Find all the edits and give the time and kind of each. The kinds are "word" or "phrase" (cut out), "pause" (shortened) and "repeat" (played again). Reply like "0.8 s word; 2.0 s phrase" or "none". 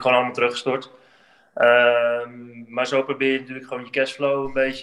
none

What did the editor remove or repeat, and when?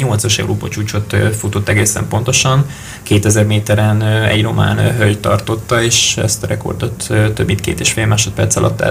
none

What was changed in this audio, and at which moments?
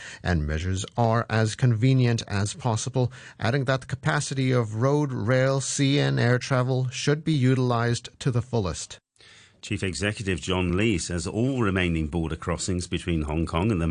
none

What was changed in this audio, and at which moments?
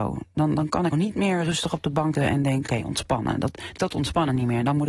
0.9 s word; 2.2 s word; 2.7 s word; 3.8 s word

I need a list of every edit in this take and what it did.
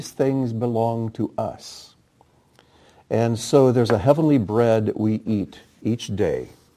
none

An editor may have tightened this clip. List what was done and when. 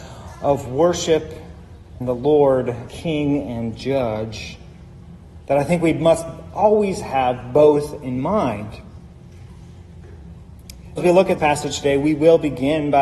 2.0 s word; 2.9 s word; 11.0 s word; 11.4 s word

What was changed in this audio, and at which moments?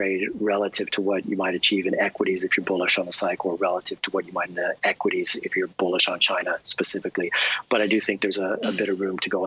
4.5 s word

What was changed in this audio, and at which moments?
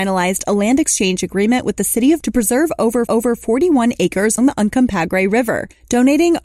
2.2 s word; 3.1 s repeat; 4.4 s word

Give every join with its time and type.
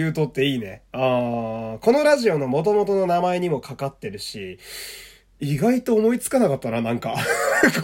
none

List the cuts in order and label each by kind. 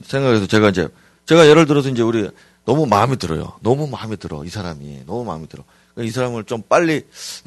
none

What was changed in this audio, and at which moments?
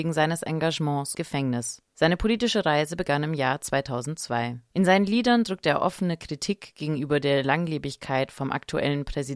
1.1 s phrase

